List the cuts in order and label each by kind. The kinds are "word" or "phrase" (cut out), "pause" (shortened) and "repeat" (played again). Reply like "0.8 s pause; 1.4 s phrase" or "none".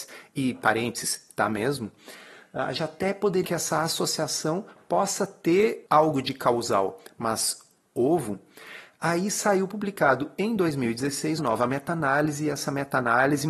2.7 s word; 3.4 s word; 11.4 s word